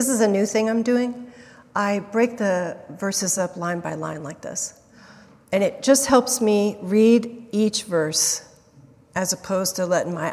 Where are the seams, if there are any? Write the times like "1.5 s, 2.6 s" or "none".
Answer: none